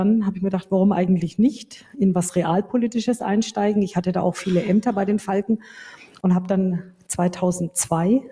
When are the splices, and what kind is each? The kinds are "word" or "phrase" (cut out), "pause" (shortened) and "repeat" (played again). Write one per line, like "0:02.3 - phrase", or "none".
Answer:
none